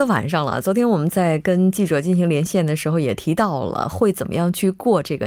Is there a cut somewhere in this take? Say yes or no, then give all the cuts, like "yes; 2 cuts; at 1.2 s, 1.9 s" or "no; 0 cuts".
no; 0 cuts